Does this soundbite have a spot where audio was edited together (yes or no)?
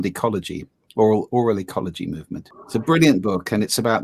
no